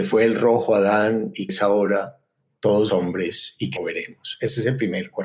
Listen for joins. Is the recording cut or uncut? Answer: cut